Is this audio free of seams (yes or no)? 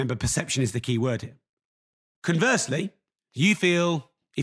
yes